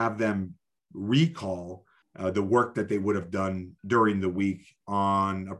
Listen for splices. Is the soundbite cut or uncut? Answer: cut